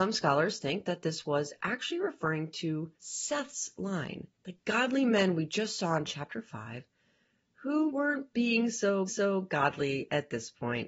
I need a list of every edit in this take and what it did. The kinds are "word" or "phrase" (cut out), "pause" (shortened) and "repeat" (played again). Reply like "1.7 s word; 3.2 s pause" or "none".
3.0 s pause; 4.3 s pause; 7.9 s word; 9.1 s repeat